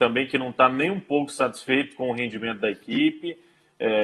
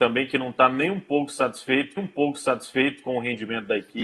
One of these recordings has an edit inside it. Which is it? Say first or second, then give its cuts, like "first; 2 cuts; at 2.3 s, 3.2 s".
second; 1 cut; at 2.0 s